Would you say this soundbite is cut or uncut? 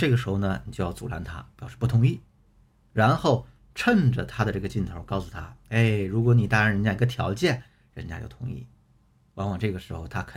uncut